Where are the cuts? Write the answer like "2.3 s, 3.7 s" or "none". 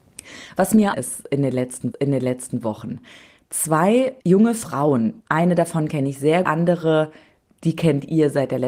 0.9 s, 1.9 s, 4.2 s, 5.2 s, 6.4 s